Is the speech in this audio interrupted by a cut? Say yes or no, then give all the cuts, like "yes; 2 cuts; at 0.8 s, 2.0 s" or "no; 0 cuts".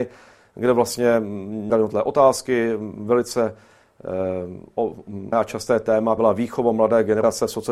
yes; 3 cuts; at 1.7 s, 5.3 s, 6.2 s